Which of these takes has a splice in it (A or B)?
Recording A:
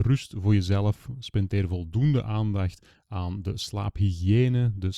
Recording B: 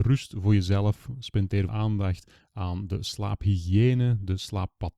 B